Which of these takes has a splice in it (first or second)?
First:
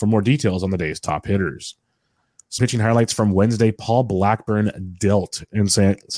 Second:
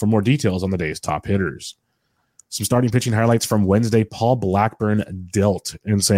first